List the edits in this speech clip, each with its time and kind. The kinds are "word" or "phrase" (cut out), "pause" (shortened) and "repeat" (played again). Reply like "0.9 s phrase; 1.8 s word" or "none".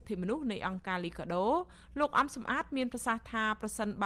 none